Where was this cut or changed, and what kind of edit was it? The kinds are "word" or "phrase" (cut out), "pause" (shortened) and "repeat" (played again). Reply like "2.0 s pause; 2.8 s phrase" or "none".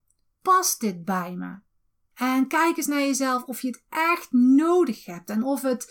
none